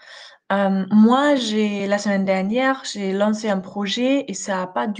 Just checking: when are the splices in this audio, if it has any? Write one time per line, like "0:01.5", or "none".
none